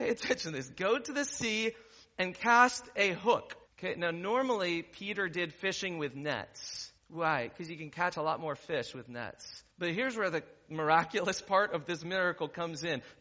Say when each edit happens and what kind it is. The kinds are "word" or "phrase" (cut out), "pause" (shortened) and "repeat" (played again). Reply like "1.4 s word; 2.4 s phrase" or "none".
3.7 s pause; 7.0 s pause; 9.7 s pause